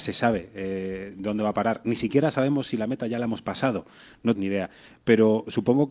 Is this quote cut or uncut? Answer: cut